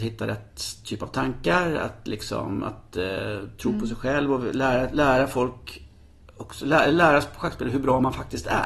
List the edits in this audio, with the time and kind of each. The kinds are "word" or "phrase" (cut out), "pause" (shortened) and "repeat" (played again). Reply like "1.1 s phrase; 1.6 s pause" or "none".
none